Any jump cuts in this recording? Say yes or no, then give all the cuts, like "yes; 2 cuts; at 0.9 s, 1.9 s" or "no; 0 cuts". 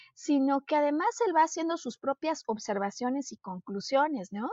no; 0 cuts